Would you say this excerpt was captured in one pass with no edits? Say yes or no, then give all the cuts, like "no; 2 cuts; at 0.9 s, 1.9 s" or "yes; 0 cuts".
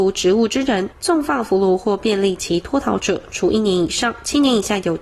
no; 1 cut; at 0.9 s